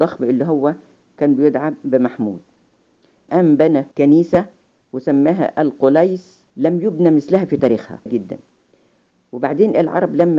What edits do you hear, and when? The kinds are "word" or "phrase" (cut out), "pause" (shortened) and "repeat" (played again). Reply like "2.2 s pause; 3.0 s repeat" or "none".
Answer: 3.3 s word; 3.9 s pause; 6.5 s pause; 8.1 s phrase